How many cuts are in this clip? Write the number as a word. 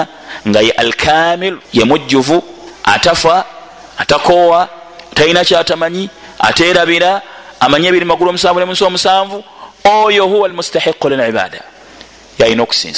two